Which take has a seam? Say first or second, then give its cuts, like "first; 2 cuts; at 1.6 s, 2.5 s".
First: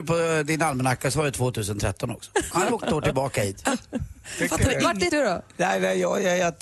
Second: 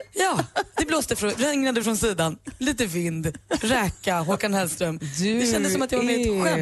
first; 3 cuts; at 2.5 s, 2.8 s, 5.1 s